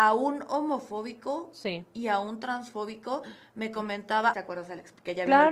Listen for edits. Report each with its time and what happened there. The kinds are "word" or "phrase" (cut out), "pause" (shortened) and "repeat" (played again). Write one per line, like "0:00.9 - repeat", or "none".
0:04.3 - word